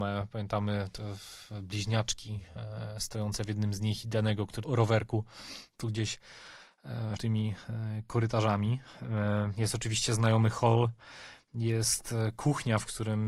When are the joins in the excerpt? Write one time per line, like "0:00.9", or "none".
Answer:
0:04.6
0:05.8
0:07.2